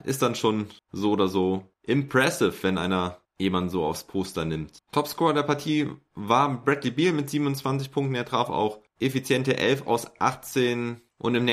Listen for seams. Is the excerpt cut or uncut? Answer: uncut